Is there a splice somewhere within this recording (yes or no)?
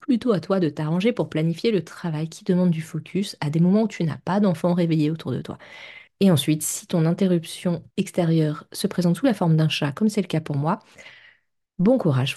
yes